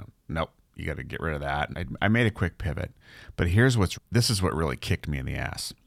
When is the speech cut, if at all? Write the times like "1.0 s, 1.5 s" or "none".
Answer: 1.7 s, 3.9 s